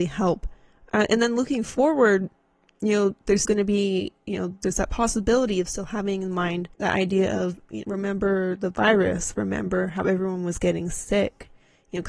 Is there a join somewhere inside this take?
yes; 3 cuts; at 3.4 s, 6.7 s, 7.8 s

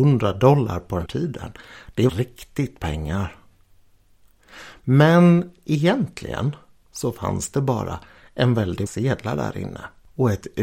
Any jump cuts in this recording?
yes; 4 cuts; at 1.1 s, 2.1 s, 2.8 s, 8.9 s

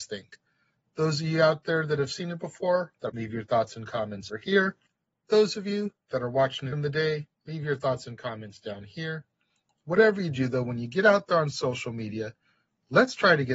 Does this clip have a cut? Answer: yes; 4 cuts; at 3.1 s, 4.3 s, 6.7 s, 7.3 s

